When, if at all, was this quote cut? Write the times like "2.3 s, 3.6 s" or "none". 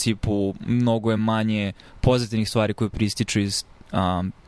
none